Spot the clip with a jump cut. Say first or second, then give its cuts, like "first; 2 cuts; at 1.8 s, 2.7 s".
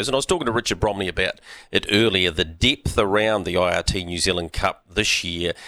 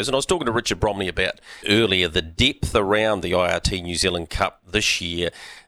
second; 1 cut; at 1.6 s